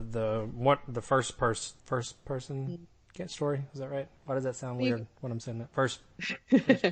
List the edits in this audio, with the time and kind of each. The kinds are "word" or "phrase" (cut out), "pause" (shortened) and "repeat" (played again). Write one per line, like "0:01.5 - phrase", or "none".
0:01.8 - pause
0:04.2 - pause